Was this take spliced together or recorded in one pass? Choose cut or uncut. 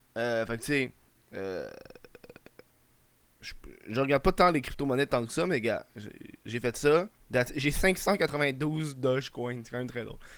cut